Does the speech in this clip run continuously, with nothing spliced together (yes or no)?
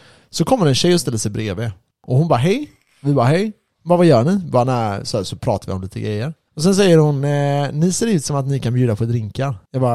yes